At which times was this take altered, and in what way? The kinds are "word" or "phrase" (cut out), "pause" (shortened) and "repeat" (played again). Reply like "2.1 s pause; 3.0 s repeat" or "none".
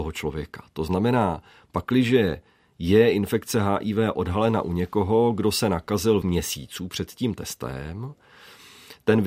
6.2 s phrase